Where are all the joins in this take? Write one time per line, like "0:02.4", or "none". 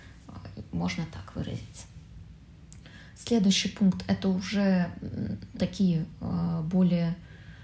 0:05.5